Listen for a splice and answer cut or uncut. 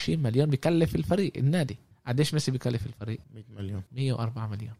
cut